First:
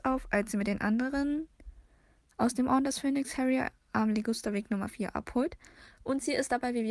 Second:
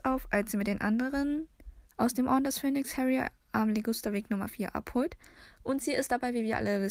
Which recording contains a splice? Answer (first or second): second